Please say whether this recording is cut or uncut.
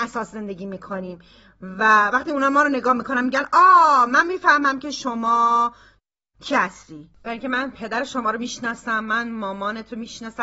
uncut